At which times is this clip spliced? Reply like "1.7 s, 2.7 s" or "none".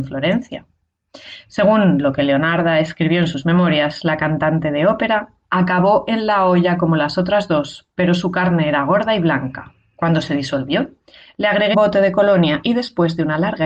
11.7 s